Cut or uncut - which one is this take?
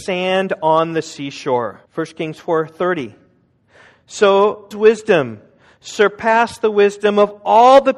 cut